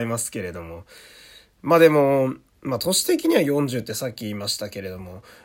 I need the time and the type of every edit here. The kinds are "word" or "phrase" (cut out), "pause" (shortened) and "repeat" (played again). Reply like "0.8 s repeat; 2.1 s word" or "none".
none